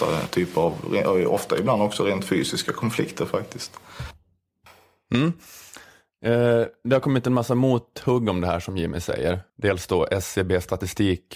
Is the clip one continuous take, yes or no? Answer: no